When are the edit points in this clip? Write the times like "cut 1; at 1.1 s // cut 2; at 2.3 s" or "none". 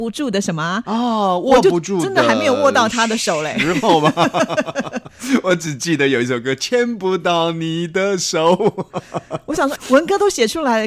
cut 1; at 9.8 s